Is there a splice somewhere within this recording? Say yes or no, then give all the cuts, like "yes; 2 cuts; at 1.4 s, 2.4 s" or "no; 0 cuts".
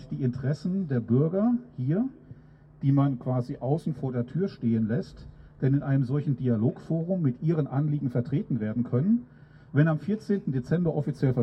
no; 0 cuts